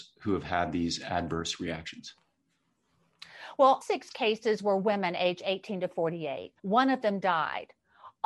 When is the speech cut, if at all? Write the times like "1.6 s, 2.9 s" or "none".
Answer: 3.8 s, 6.6 s